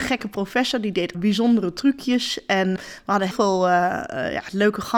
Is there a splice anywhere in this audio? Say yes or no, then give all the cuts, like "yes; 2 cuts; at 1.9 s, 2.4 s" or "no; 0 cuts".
yes; 3 cuts; at 1.1 s, 2.8 s, 3.3 s